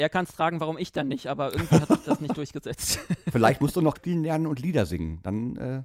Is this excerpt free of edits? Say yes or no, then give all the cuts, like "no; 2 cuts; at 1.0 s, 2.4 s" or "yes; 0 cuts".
no; 1 cut; at 4.0 s